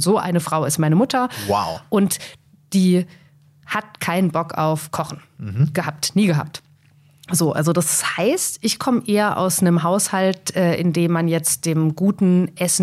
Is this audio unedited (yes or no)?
yes